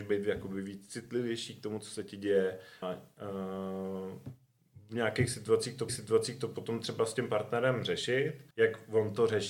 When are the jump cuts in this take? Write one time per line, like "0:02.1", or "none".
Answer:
0:02.8
0:05.9
0:08.5